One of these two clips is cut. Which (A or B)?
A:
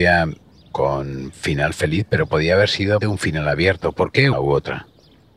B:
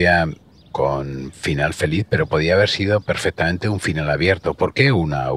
A